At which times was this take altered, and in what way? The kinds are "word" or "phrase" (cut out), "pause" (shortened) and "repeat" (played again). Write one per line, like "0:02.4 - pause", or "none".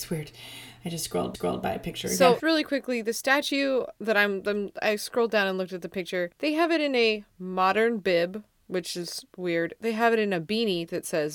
0:01.3 - repeat
0:02.4 - word
0:06.3 - pause
0:09.3 - pause